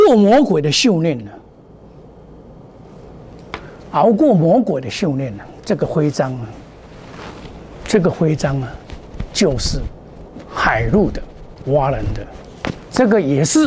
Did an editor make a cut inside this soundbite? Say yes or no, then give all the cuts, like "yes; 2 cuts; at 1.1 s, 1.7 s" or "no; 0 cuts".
yes; 1 cut; at 11.6 s